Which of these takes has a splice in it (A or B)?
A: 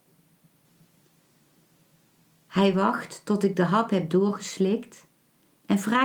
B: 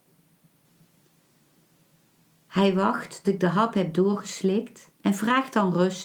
B